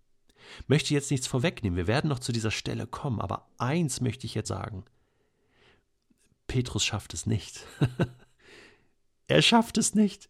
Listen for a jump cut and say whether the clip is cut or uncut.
cut